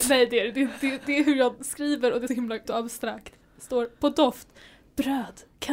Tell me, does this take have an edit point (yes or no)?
yes